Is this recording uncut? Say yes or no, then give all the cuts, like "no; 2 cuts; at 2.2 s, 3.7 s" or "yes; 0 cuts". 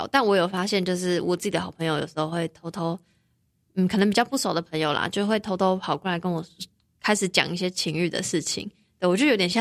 yes; 0 cuts